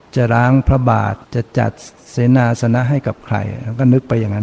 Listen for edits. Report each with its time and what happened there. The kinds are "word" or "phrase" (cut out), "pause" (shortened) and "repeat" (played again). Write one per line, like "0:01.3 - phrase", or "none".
0:01.2 - pause